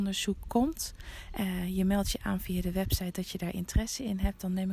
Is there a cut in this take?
no; 0 cuts

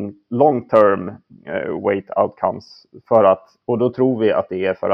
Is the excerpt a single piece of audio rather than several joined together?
yes; 0 cuts

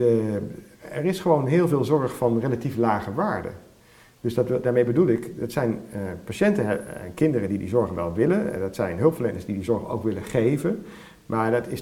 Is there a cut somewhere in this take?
no; 0 cuts

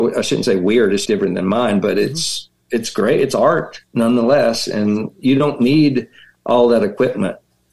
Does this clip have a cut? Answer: yes; 3 cuts; at 1.0 s, 2.6 s, 3.9 s

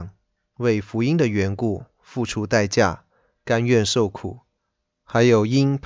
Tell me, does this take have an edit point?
no; 0 cuts

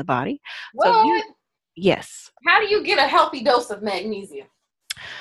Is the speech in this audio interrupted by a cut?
no; 0 cuts

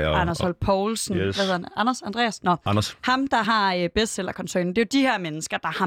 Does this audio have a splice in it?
no; 0 cuts

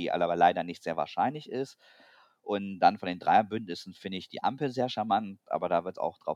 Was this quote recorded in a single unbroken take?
yes; 0 cuts

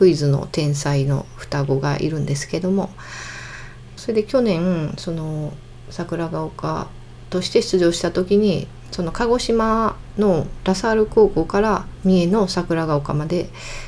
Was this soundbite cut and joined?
yes; 1 cut; at 4.0 s

